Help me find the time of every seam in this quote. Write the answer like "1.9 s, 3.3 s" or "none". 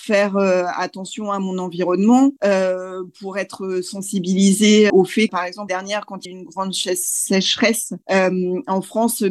2.4 s, 4.9 s, 5.3 s, 5.7 s, 6.3 s, 8.0 s

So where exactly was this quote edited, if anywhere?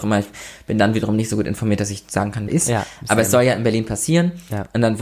2.5 s

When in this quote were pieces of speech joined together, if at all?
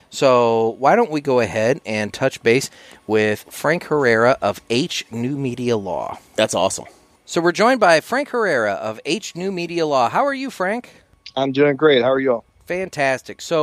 none

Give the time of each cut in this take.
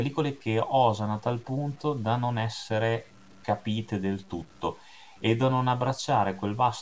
none

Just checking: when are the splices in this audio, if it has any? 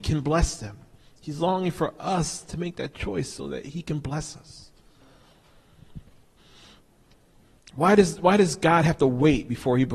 none

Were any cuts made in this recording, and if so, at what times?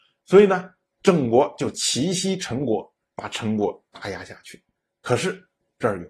4.7 s

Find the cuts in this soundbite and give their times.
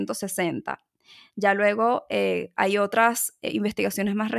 none

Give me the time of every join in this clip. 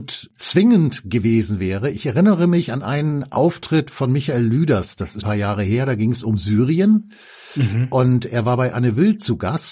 5.2 s

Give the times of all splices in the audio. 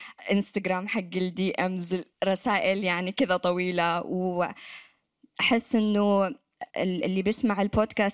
2.1 s, 6.7 s

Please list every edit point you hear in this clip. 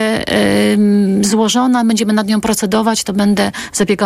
none

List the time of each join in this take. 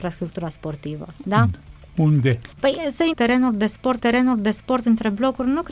1.2 s, 2.5 s, 3.1 s, 4.0 s

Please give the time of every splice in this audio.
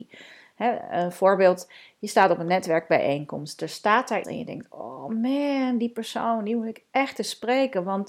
4.2 s

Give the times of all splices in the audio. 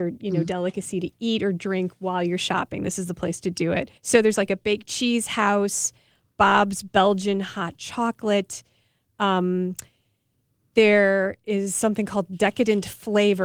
4.0 s

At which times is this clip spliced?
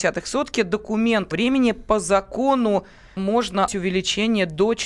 1.3 s, 3.2 s, 3.7 s

